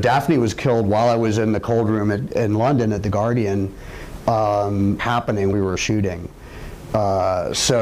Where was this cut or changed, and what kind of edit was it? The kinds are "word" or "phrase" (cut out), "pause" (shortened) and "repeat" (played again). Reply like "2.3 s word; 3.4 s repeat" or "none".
5.0 s phrase; 5.5 s word

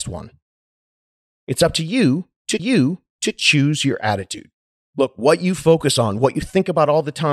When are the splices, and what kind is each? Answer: 2.6 s repeat; 4.6 s pause

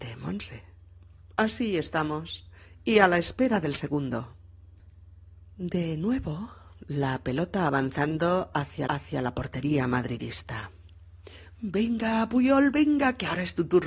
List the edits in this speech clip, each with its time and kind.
8.9 s repeat

